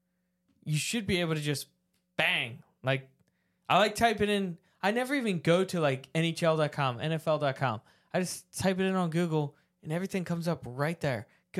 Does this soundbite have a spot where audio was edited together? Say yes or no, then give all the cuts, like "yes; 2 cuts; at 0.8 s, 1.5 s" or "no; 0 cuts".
no; 0 cuts